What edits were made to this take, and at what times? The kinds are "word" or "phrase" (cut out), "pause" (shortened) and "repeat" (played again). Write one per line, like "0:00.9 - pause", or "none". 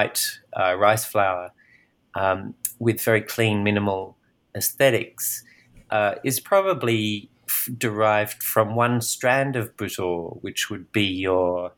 none